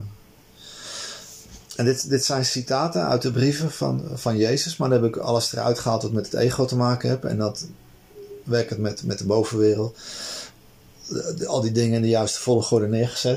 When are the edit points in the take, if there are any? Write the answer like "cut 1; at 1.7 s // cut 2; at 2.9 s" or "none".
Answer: cut 1; at 1.7 s

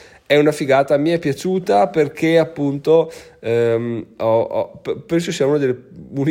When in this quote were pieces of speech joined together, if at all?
none

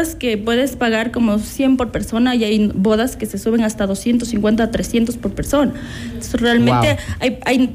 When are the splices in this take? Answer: none

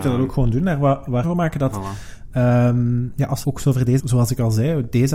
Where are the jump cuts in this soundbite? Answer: cut 1; at 1.2 s // cut 2; at 3.4 s // cut 3; at 4.0 s

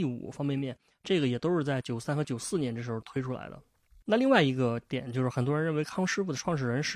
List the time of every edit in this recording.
none

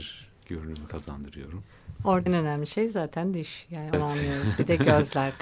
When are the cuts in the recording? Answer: cut 1; at 2.3 s // cut 2; at 3.9 s

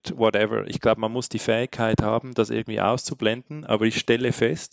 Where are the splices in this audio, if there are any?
none

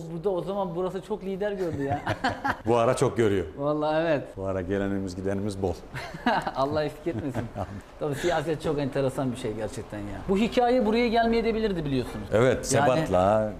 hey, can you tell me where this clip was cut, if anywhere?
none

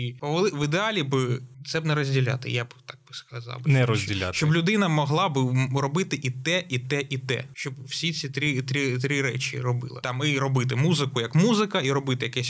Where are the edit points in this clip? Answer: none

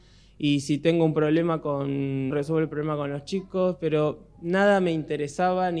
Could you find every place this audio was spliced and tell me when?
cut 1; at 2.3 s

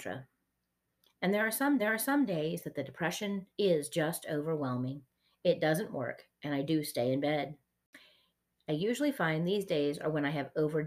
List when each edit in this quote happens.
cut 1; at 1.8 s // cut 2; at 3.5 s

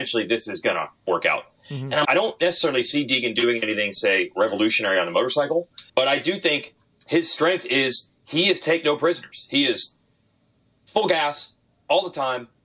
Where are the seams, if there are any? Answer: cut 1; at 1.0 s // cut 2; at 2.0 s // cut 3; at 5.9 s

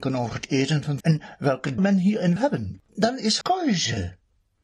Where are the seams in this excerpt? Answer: cut 1; at 1.0 s // cut 2; at 1.8 s // cut 3; at 2.4 s // cut 4; at 2.9 s // cut 5; at 3.4 s

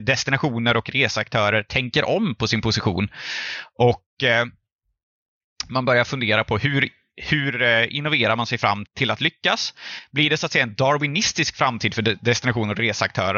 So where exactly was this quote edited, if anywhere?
cut 1; at 8.9 s

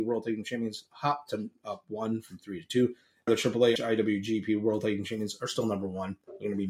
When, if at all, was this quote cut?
cut 1; at 3.3 s // cut 2; at 3.8 s

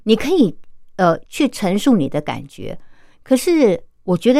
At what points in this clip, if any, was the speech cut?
cut 1; at 1.3 s

